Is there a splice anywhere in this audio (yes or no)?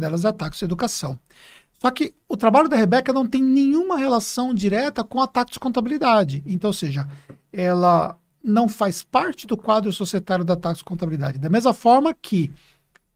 no